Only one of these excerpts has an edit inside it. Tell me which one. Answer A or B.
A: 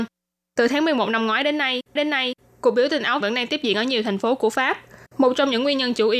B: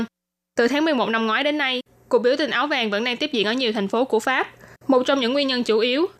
A